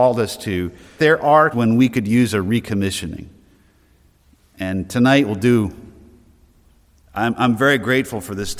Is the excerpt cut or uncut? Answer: cut